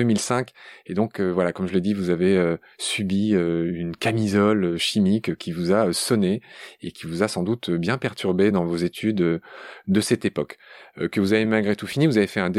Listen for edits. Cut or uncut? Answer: uncut